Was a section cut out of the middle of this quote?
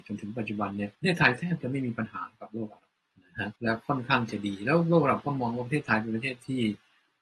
yes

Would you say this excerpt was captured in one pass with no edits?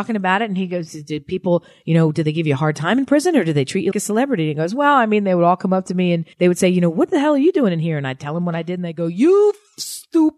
no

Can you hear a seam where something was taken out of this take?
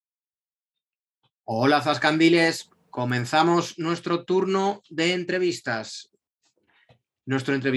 no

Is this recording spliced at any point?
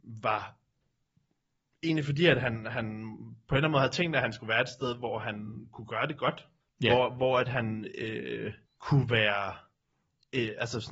yes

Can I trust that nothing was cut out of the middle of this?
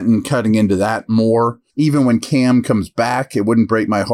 no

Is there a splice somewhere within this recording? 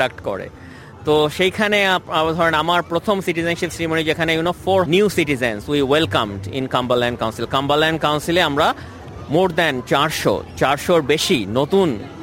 yes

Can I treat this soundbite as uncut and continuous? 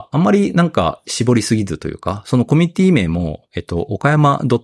no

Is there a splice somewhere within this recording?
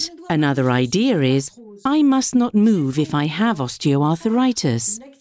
no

